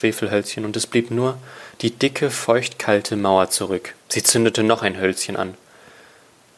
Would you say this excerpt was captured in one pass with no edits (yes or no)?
no